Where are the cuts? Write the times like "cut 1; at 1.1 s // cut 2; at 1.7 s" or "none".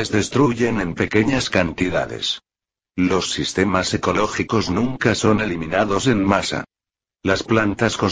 none